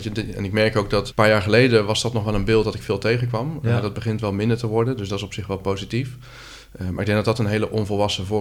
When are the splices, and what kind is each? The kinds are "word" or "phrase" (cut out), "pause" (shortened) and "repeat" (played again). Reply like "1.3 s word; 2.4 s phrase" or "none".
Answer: 1.1 s word